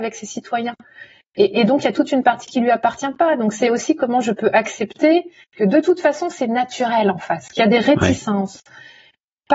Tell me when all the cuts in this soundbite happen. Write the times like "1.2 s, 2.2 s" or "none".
none